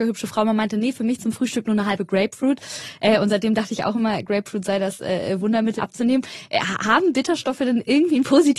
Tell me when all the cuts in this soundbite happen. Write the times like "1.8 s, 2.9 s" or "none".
5.8 s